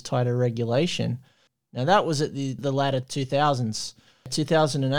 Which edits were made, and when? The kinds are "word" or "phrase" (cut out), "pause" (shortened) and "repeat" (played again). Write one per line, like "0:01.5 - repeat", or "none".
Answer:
none